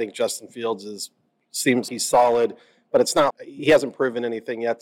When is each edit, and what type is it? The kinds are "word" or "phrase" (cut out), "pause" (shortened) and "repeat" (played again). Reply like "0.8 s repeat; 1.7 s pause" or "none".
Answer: 1.9 s word; 3.3 s word